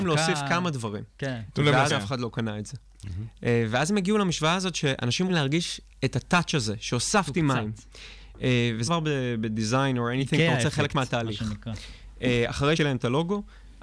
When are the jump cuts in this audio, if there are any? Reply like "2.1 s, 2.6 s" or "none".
1.9 s, 5.3 s, 8.9 s, 12.8 s